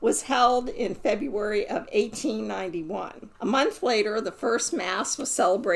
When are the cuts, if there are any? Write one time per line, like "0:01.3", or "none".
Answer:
0:03.3